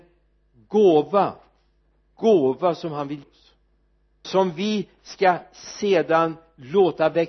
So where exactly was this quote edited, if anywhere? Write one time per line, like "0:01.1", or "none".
0:02.1
0:03.2
0:04.2